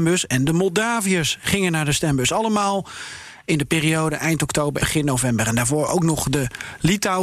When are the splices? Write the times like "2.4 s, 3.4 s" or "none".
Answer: 4.8 s